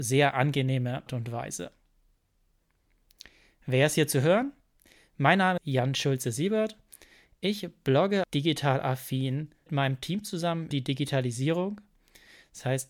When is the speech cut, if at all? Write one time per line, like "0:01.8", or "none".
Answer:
0:01.1
0:05.6
0:08.2
0:09.7
0:10.7